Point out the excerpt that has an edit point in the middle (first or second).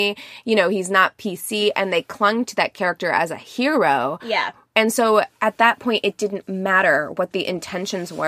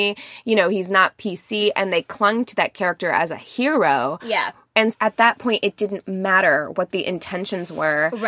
second